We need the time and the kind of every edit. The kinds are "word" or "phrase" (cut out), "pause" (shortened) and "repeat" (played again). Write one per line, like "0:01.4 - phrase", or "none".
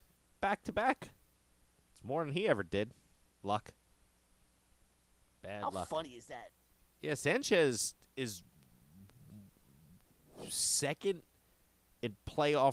none